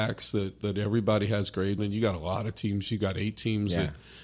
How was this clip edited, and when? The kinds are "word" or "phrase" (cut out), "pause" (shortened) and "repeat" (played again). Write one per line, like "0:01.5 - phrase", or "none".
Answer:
0:01.8 - word

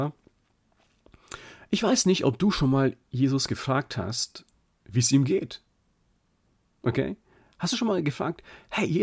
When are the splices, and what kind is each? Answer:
none

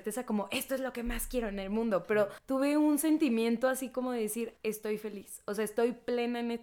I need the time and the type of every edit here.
0:02.4 - pause
0:04.6 - pause

